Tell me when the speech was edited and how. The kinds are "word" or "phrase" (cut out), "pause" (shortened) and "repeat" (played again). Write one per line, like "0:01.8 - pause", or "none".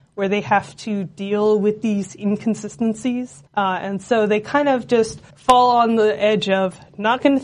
0:03.5 - pause
0:05.3 - pause